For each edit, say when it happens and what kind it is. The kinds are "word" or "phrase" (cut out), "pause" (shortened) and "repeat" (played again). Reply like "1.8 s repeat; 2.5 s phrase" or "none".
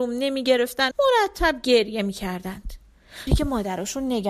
0.9 s word; 3.3 s word